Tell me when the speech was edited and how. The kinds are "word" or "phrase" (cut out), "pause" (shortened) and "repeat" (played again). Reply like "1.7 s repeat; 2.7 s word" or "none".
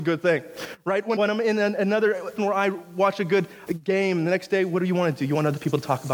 1.2 s word; 2.4 s word; 3.7 s word

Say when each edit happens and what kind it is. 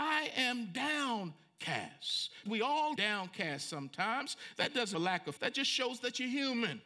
2.5 s word; 3.0 s word; 4.9 s word; 5.4 s word

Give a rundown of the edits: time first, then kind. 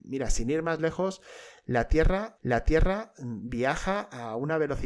2.4 s repeat

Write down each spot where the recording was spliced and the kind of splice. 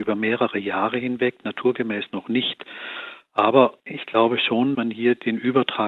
3.8 s pause; 4.7 s word

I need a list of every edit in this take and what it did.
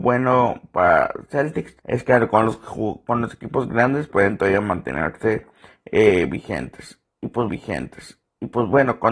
1.8 s pause; 4.1 s word; 7.5 s repeat

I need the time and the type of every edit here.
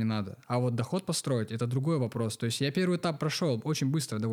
none

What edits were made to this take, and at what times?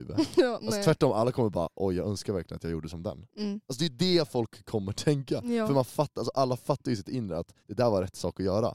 7.6 s pause

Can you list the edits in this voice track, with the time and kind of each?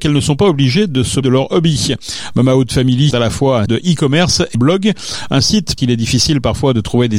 1.2 s word; 3.1 s word; 3.7 s word; 4.5 s word; 5.8 s word

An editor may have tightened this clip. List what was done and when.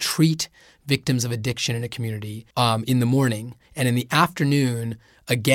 2.5 s pause

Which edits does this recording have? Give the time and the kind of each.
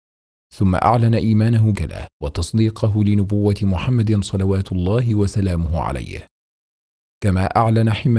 1.7 s phrase; 2.1 s pause

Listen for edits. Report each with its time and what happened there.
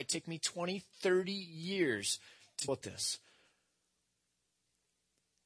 2.7 s word

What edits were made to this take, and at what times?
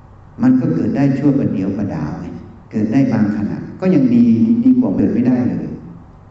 2.6 s pause

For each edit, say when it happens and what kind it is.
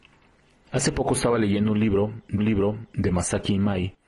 2.4 s repeat

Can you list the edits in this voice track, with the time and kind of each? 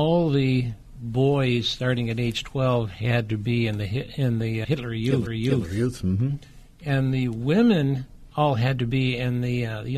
4.6 s word; 5.3 s repeat

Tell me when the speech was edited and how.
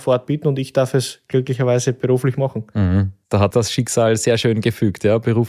3.5 s word

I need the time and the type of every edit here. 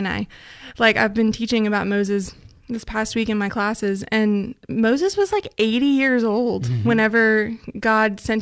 none

